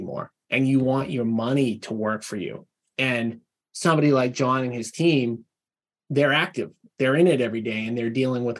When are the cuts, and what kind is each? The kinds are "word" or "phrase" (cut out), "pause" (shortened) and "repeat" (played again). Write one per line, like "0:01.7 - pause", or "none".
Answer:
none